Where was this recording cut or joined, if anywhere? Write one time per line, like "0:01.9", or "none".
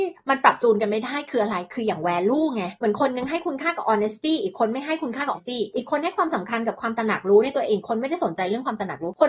0:05.3